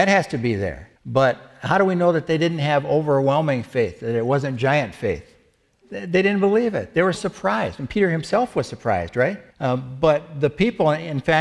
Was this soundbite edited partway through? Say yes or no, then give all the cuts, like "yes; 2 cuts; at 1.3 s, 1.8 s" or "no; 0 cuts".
yes; 4 cuts; at 1.0 s, 5.7 s, 7.1 s, 9.5 s